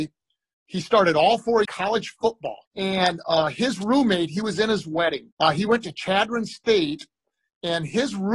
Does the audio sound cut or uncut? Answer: cut